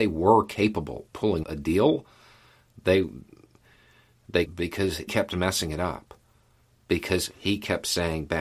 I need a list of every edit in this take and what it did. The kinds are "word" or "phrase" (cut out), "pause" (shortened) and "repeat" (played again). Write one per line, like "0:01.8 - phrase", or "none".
0:01.1 - word
0:01.4 - word
0:04.5 - word
0:05.1 - word

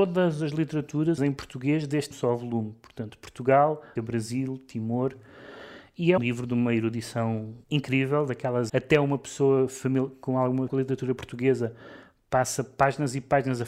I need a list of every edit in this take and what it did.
0:01.2 - word
0:02.1 - phrase
0:04.0 - word
0:06.2 - word
0:07.6 - pause
0:08.7 - phrase
0:10.7 - word

